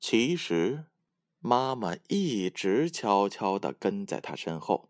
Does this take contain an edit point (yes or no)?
no